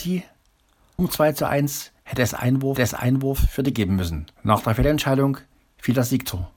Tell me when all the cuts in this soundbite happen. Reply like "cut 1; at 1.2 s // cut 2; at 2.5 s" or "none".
cut 1; at 1.0 s // cut 2; at 2.0 s // cut 3; at 2.8 s // cut 4; at 3.7 s // cut 5; at 4.3 s